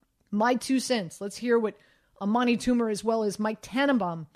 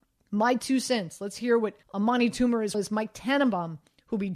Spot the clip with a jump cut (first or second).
second